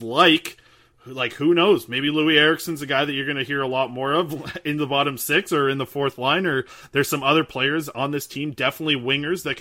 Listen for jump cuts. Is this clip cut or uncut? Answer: uncut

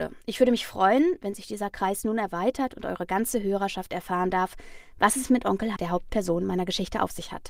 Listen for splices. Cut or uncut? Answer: cut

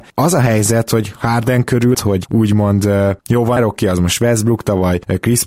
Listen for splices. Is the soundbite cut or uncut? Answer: cut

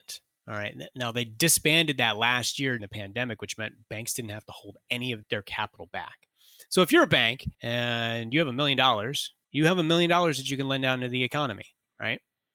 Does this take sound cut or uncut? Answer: cut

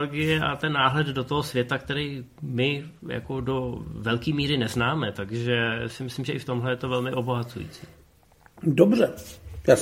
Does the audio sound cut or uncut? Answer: uncut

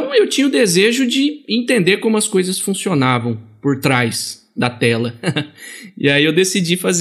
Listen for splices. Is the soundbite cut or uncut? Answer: uncut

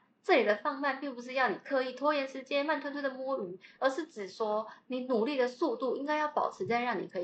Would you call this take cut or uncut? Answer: uncut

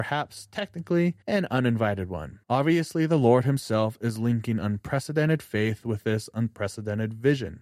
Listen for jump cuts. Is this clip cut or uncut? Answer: cut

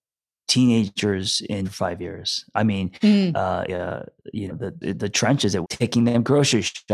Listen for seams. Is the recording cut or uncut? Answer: cut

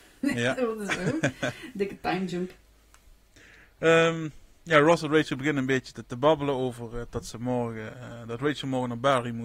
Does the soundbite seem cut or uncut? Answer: cut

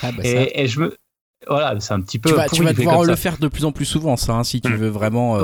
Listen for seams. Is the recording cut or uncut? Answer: uncut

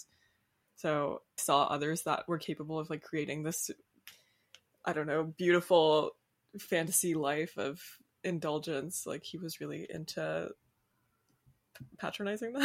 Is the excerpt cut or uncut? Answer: cut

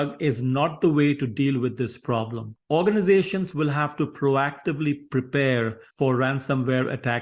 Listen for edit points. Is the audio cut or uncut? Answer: cut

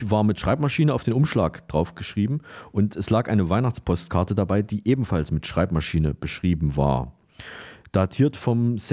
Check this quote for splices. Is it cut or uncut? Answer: uncut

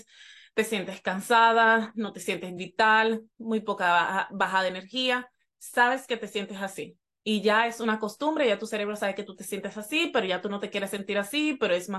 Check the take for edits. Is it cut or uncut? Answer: uncut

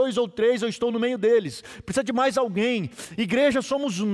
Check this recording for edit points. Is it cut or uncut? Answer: uncut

